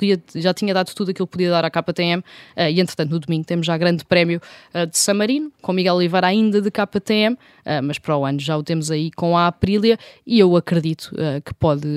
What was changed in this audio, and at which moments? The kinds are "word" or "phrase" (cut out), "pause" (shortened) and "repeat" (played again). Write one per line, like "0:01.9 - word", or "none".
none